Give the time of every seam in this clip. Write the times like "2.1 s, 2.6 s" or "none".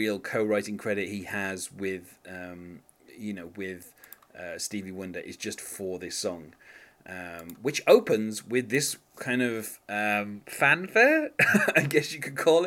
none

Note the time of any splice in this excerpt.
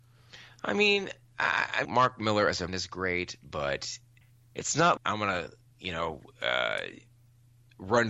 1.8 s, 2.7 s, 4.2 s, 5.0 s

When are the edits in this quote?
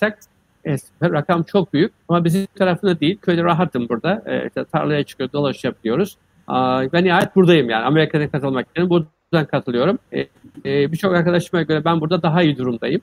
2.0 s, 2.6 s, 10.0 s

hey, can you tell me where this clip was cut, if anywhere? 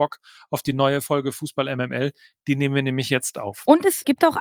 none

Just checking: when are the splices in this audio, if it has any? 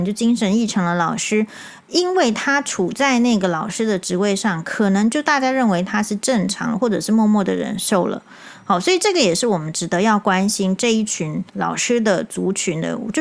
11.5 s

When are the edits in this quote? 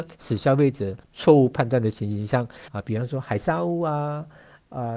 1.0 s, 2.7 s

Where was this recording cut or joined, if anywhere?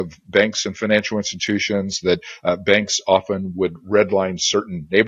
none

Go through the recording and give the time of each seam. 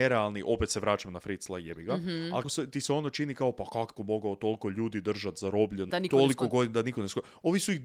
2.4 s, 4.0 s, 5.9 s

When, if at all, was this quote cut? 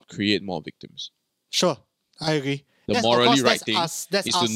1.3 s

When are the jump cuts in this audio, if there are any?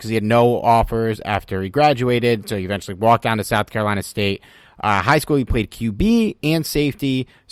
none

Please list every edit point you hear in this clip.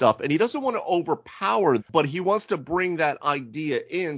1.8 s

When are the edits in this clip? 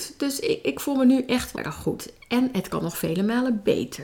1.5 s

